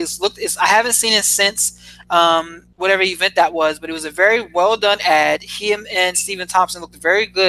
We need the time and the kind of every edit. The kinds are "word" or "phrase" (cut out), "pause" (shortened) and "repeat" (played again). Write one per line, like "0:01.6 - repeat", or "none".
0:02.7 - pause